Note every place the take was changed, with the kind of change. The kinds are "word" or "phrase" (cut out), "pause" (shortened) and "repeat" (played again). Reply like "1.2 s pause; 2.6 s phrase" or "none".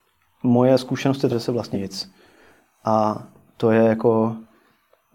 1.3 s word; 1.7 s word